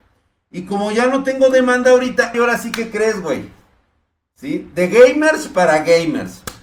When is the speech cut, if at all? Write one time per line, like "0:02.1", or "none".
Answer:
0:02.3